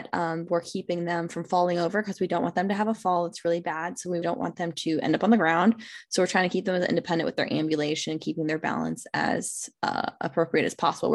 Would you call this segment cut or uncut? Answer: cut